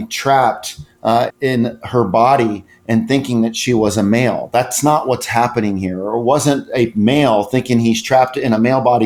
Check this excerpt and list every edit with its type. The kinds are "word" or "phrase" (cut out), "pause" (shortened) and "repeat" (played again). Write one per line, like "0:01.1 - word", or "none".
0:01.3 - word